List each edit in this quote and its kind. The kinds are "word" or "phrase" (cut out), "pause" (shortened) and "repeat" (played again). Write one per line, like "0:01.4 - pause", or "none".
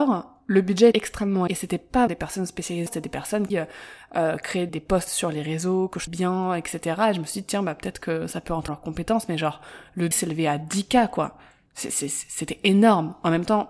0:00.9 - word
0:01.5 - word
0:02.1 - word
0:02.9 - word
0:03.5 - word
0:04.7 - word
0:06.1 - word
0:08.7 - word
0:10.1 - word